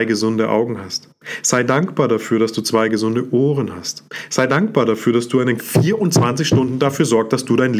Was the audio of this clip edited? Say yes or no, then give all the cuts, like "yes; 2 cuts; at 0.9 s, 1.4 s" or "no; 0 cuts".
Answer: yes; 1 cut; at 5.6 s